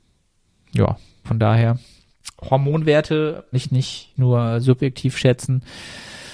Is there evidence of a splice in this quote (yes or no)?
yes